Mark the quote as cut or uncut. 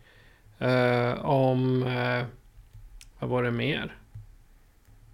uncut